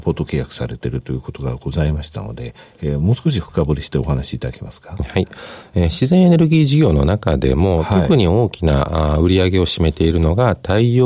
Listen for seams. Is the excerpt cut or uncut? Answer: uncut